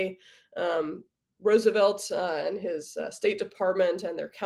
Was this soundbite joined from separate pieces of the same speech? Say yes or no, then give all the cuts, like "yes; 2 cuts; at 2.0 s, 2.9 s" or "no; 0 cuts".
no; 0 cuts